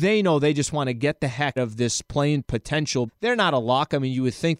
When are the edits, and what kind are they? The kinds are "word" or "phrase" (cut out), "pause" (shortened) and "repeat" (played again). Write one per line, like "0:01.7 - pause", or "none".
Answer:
0:01.6 - word
0:02.4 - word
0:03.1 - word